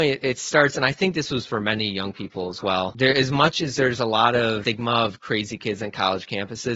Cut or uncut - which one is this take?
uncut